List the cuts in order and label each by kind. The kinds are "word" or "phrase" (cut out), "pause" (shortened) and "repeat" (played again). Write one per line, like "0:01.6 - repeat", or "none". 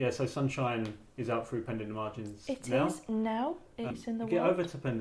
0:03.9 - word